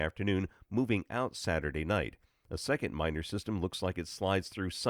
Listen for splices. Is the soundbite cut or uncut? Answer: uncut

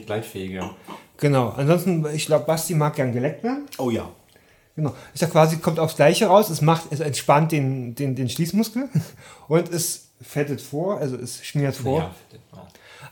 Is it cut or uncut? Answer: uncut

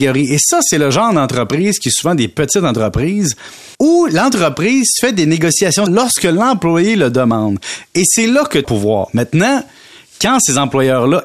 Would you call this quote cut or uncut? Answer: cut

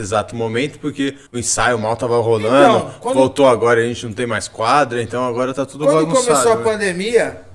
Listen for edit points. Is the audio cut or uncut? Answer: cut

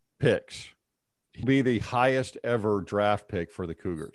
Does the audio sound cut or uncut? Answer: cut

